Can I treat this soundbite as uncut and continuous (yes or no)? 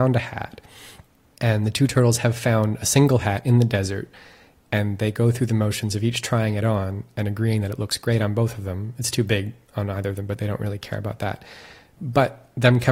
yes